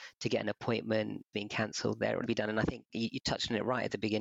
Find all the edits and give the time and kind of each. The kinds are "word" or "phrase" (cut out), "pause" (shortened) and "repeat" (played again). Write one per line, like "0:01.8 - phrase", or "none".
0:01.3 - phrase
0:02.3 - phrase